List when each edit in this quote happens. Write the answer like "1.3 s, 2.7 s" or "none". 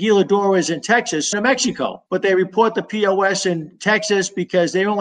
1.3 s, 2.1 s